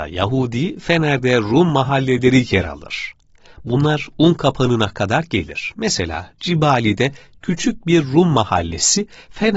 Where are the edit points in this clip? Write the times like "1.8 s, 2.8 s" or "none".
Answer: none